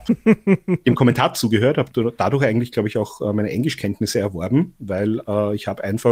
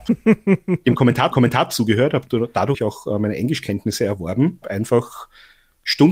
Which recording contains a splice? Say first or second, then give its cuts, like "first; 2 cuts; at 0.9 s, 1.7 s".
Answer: second; 3 cuts; at 1.3 s, 2.7 s, 4.6 s